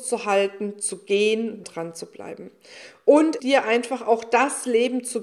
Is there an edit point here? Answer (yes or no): yes